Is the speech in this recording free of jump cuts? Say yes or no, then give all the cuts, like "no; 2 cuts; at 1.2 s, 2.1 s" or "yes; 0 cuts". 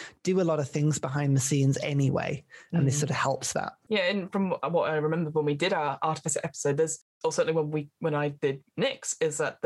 yes; 0 cuts